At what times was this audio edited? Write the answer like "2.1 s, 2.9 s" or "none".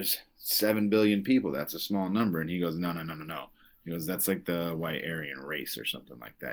none